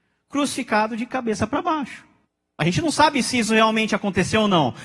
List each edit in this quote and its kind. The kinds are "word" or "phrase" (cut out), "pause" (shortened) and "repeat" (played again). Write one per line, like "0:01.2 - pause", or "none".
0:02.2 - pause